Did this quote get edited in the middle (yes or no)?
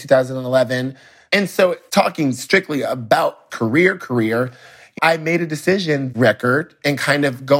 yes